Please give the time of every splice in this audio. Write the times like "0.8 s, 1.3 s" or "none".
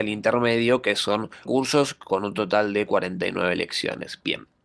1.5 s